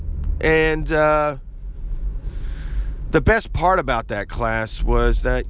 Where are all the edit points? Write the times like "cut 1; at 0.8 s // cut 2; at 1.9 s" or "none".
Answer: none